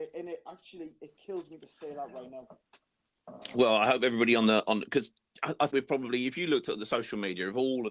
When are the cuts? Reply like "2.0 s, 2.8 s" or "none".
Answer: 5.7 s